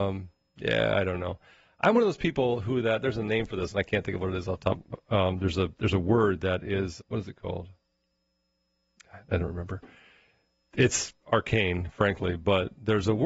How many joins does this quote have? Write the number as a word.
two